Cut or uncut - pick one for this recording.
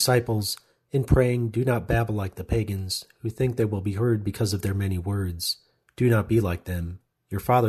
uncut